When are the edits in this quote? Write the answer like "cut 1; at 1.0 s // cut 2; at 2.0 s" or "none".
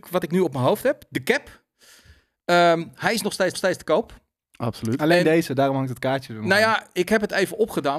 cut 1; at 3.5 s